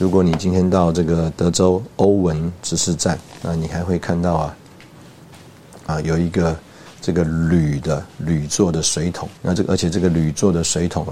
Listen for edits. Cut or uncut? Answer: cut